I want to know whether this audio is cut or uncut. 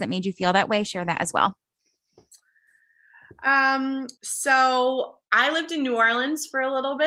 cut